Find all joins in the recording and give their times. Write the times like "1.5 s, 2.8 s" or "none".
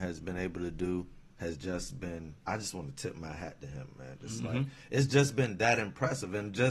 1.3 s, 2.4 s